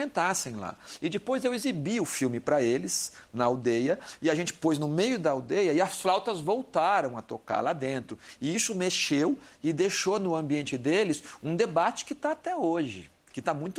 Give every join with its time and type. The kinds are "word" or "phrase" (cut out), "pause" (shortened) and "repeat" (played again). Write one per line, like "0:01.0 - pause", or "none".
none